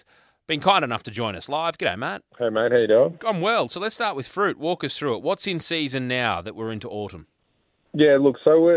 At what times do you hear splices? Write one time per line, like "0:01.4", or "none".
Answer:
0:02.3

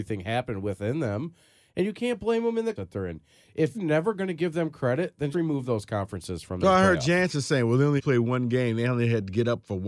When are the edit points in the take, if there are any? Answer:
0:02.8
0:03.7
0:05.3
0:08.0

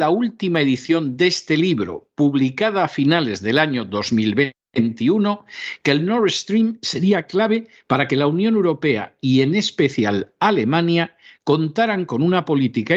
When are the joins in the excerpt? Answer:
none

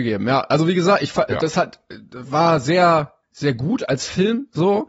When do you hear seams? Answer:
0:03.2

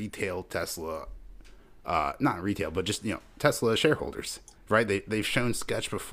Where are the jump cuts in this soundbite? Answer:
none

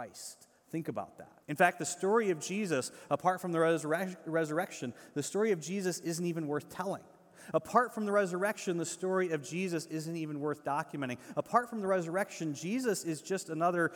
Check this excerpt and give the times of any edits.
0:01.4

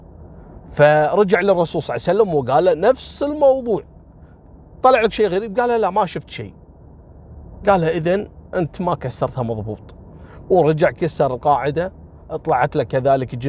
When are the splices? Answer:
0:04.8

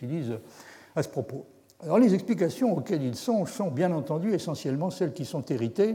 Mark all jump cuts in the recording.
none

